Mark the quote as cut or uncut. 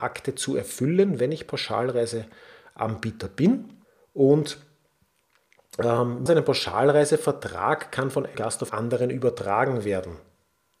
cut